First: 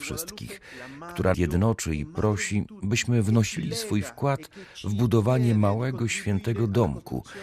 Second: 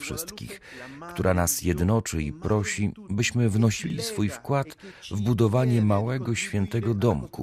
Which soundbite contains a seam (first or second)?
first